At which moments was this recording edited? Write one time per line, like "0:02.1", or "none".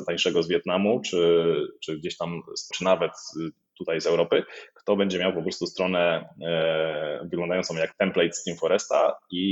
0:02.7